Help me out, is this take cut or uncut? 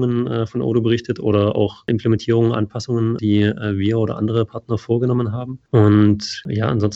uncut